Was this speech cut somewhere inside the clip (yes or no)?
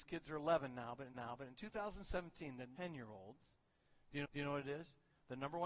yes